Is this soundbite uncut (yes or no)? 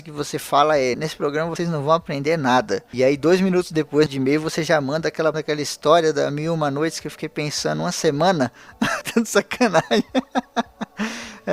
no